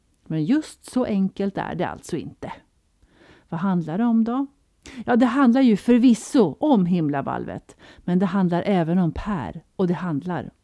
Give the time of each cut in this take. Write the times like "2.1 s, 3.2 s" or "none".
none